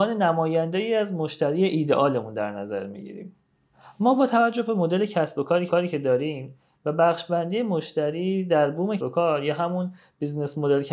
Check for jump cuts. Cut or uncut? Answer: cut